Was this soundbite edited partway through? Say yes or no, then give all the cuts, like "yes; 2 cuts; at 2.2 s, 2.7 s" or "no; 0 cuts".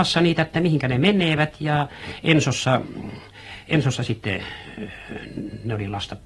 no; 0 cuts